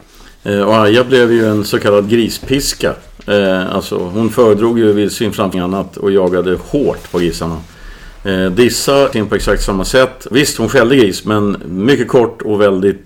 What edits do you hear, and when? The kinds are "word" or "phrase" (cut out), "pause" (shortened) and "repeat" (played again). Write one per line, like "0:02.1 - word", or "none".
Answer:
0:05.5 - word
0:09.1 - word
0:10.3 - word